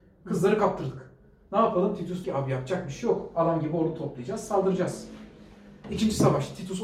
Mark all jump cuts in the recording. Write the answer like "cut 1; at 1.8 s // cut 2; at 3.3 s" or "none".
cut 1; at 2.2 s